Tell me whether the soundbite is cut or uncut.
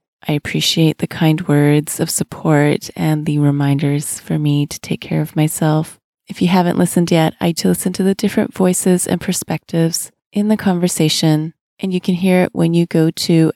cut